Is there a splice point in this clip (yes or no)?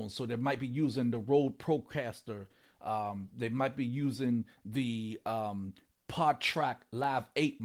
no